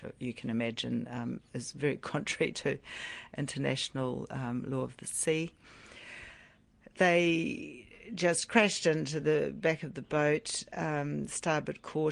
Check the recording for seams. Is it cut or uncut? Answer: uncut